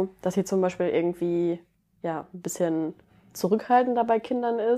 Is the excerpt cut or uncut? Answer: uncut